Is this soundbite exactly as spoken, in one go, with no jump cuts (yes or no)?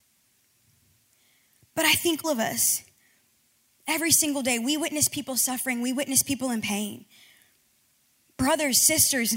no